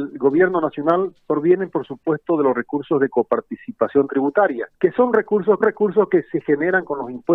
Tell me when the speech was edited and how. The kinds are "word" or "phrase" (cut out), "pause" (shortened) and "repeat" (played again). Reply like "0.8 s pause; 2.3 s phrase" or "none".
4.7 s pause; 5.6 s repeat